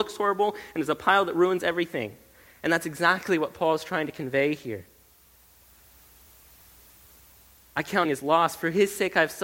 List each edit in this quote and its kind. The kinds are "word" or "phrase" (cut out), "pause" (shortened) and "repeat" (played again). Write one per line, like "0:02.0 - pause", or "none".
0:08.0 - word